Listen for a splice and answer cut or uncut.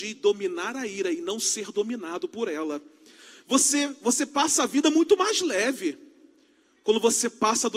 uncut